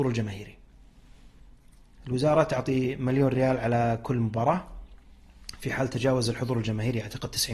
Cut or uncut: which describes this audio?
uncut